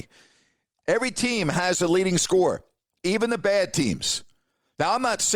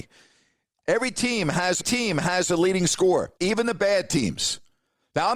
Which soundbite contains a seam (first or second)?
second